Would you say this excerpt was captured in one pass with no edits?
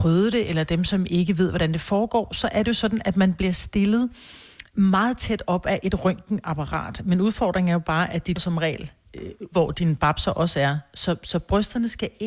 no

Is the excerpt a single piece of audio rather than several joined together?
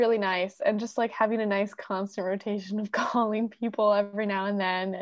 yes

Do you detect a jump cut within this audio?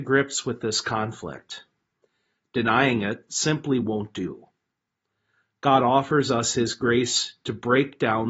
no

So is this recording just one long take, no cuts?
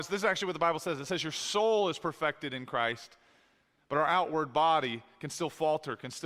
yes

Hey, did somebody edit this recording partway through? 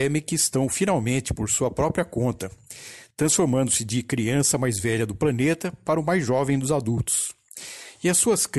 no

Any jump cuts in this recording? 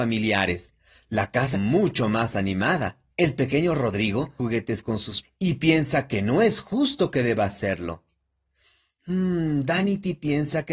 yes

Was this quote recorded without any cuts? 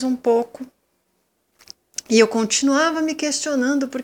yes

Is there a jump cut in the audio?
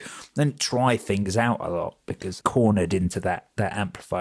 yes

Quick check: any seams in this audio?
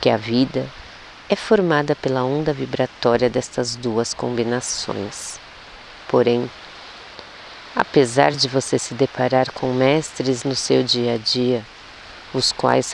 no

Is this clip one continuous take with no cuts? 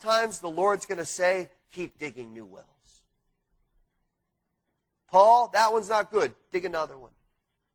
yes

